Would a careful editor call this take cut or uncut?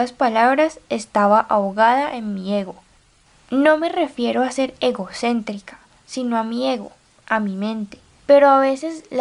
uncut